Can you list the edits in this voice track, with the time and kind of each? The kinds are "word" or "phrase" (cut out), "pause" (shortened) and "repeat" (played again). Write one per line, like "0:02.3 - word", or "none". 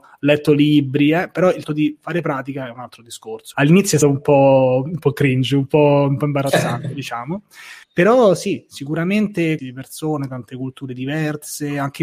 0:01.6 - word
0:03.5 - word
0:04.0 - word
0:07.8 - pause
0:09.6 - phrase